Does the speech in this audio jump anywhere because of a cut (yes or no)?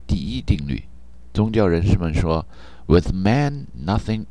no